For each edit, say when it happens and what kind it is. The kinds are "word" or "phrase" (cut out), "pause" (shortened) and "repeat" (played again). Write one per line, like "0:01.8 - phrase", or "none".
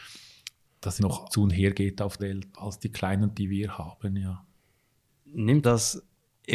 0:01.0 - word
0:01.3 - word
0:02.2 - word
0:02.5 - word
0:03.3 - word
0:05.6 - word